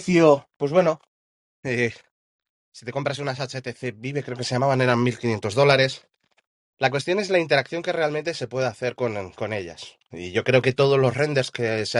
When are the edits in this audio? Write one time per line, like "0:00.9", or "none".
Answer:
none